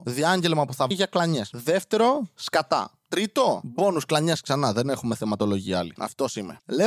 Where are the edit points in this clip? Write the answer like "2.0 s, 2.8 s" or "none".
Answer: 0.9 s